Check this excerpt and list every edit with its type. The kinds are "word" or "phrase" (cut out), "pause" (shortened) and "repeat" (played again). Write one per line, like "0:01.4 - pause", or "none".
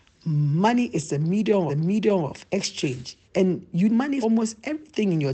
0:01.7 - repeat
0:03.2 - pause
0:03.9 - word
0:04.2 - word